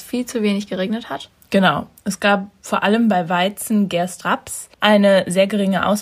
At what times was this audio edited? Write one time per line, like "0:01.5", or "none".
0:04.2
0:04.7